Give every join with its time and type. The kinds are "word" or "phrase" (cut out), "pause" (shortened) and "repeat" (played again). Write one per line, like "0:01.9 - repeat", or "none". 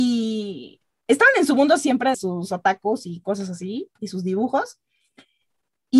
0:02.1 - word